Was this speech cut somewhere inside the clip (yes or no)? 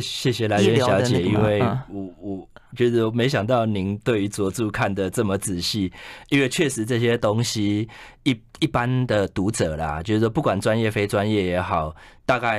yes